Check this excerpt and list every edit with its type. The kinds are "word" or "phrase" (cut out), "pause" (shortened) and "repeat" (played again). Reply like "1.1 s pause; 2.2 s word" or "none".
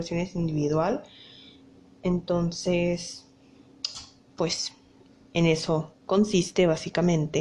none